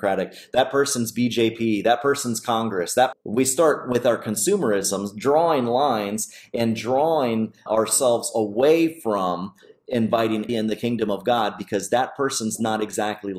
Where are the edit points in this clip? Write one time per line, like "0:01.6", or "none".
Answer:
0:03.1
0:07.7
0:10.5